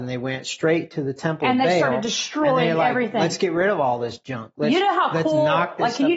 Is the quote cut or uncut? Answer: uncut